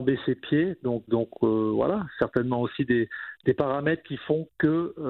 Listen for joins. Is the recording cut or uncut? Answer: cut